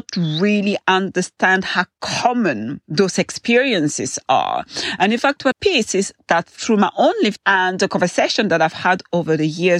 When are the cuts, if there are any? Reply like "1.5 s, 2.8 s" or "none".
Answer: 5.5 s, 7.4 s